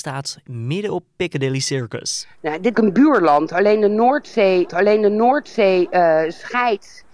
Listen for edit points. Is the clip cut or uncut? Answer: cut